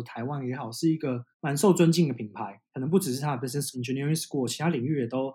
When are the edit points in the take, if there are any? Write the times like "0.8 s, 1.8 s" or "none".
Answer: 1.3 s, 2.7 s, 3.7 s